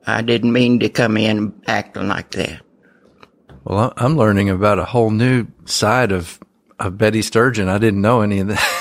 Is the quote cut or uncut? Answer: uncut